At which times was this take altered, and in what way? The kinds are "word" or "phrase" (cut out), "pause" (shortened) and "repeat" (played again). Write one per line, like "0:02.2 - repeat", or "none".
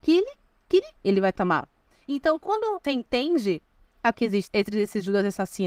0:01.0 - word
0:02.8 - word
0:04.1 - word
0:04.5 - word